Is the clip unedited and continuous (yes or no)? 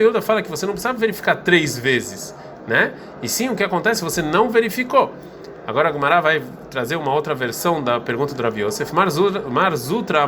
yes